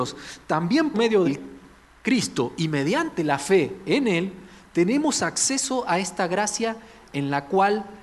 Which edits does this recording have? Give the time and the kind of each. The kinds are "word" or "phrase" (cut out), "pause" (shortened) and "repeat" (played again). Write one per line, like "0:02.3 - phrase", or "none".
0:00.9 - word
0:01.2 - word